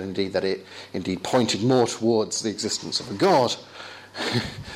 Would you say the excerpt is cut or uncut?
uncut